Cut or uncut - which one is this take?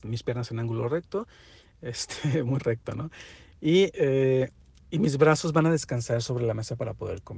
uncut